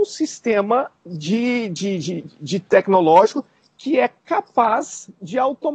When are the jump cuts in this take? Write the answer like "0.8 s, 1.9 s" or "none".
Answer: 1.0 s